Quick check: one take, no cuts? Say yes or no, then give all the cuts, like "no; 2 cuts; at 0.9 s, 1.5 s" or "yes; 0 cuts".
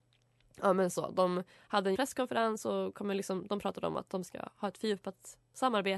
no; 1 cut; at 1.9 s